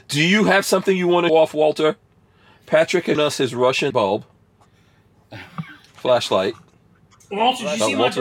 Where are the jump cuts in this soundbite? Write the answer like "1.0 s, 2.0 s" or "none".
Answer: 1.3 s, 3.2 s, 3.9 s